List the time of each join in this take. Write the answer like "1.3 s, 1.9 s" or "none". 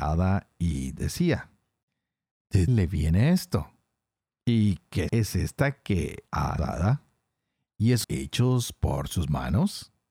2.7 s, 5.1 s, 6.3 s, 6.6 s, 8.0 s